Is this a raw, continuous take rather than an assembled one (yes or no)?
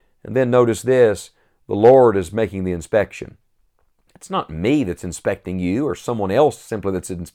yes